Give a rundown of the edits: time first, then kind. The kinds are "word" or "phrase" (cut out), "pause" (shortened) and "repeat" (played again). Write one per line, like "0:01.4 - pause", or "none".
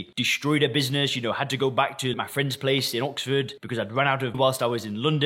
0:02.1 - word
0:04.3 - word